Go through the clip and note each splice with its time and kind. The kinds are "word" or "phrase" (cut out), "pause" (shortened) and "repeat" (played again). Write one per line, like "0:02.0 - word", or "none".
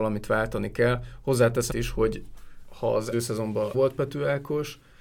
0:01.7 - word
0:03.1 - word
0:03.7 - word